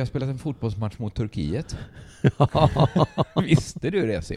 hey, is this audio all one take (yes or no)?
yes